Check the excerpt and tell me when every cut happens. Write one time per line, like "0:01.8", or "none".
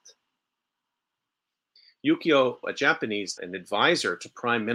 0:02.6
0:03.4